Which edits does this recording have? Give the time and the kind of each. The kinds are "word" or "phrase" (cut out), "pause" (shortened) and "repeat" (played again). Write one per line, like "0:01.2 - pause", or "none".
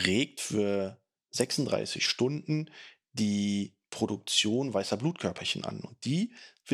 none